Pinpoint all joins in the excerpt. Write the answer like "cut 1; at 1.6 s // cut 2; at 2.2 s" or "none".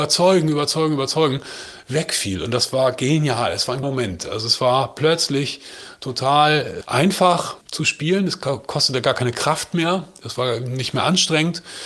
cut 1; at 3.8 s // cut 2; at 6.8 s // cut 3; at 7.6 s